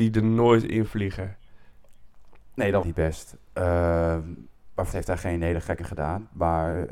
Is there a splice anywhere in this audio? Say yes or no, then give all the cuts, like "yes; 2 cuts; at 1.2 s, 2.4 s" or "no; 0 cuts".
yes; 3 cuts; at 2.8 s, 4.9 s, 5.8 s